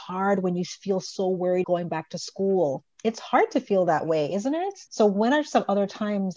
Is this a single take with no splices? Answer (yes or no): no